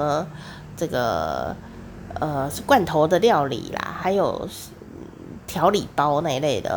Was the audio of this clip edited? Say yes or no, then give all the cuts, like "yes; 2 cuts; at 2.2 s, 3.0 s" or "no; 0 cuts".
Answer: yes; 1 cut; at 4.0 s